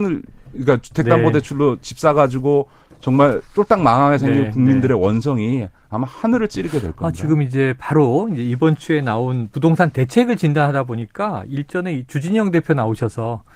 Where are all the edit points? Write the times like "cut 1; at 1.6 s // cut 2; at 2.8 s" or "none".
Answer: none

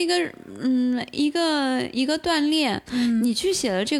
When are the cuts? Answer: none

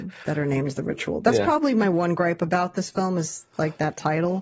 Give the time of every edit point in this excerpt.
none

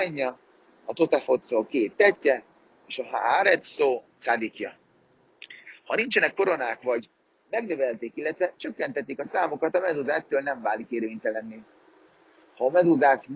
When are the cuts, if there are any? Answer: none

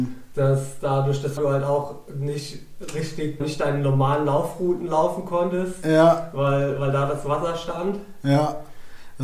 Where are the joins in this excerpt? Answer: cut 1; at 1.4 s // cut 2; at 3.4 s

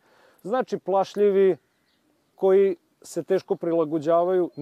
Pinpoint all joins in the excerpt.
cut 1; at 2.3 s

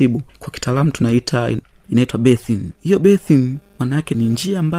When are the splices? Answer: none

